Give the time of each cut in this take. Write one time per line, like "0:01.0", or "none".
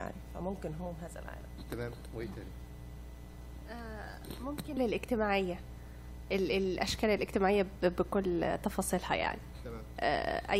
0:04.8